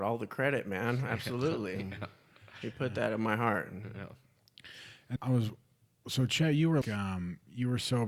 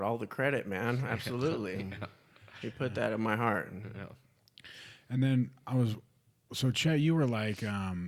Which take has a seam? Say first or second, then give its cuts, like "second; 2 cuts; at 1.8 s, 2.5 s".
first; 2 cuts; at 5.2 s, 6.8 s